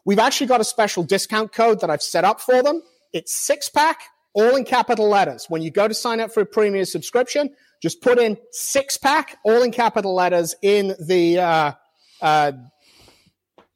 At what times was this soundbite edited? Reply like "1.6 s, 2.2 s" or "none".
none